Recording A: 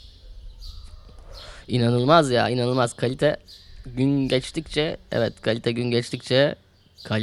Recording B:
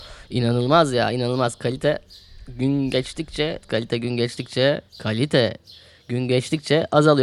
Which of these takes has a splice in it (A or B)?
B